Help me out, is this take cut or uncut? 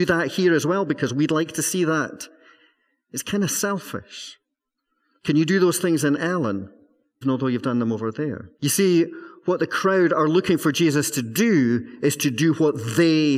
cut